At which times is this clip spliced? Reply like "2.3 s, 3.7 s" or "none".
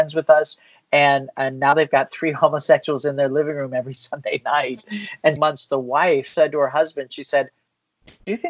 5.4 s